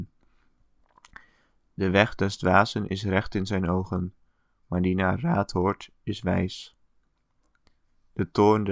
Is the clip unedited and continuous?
yes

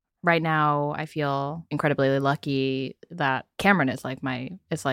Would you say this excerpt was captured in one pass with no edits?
yes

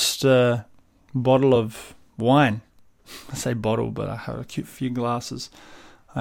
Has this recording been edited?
no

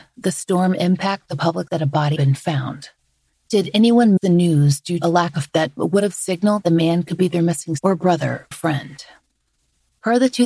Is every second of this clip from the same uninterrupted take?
no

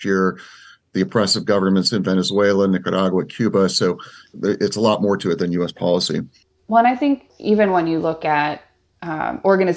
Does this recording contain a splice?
no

